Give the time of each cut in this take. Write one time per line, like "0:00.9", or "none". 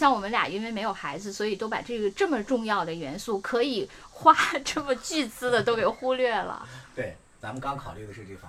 none

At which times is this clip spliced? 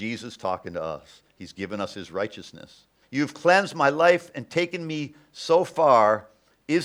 0:03.0

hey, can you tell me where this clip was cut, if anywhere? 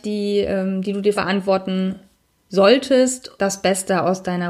0:01.2
0:03.4

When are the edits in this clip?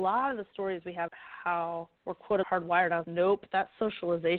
0:01.1
0:02.0
0:02.4
0:03.0

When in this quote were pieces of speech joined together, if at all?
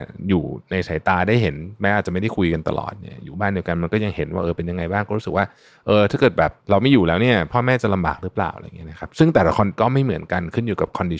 0:06.6

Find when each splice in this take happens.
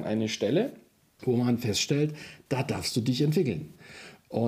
none

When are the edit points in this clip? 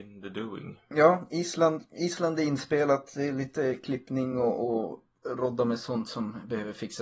none

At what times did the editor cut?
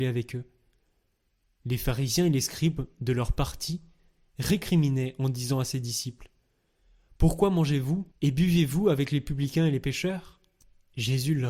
0:08.1

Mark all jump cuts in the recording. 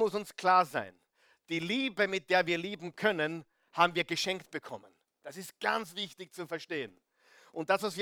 none

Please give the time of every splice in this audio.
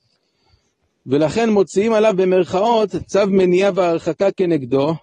none

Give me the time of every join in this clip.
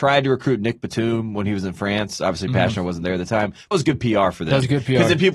0:03.7

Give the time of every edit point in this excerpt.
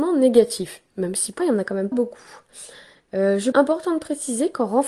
0:01.4
0:01.9
0:03.5

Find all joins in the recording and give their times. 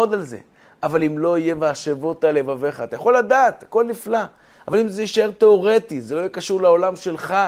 none

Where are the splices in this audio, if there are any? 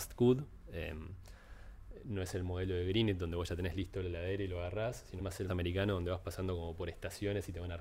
0:05.2
0:05.5

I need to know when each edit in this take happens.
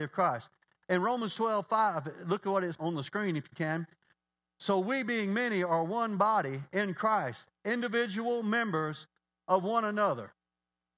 0:02.7

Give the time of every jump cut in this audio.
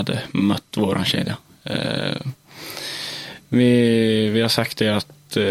none

